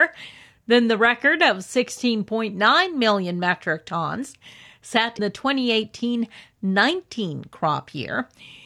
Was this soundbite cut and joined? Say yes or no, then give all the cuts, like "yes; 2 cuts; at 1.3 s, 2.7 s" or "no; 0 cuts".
yes; 1 cut; at 5.2 s